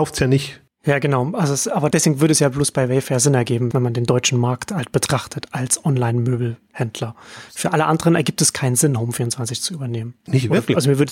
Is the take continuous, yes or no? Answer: yes